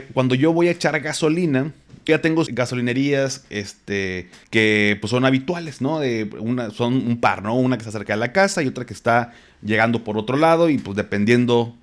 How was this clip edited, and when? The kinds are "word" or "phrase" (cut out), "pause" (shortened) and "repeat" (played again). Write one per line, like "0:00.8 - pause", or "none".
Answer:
0:02.1 - word
0:02.5 - word
0:04.4 - pause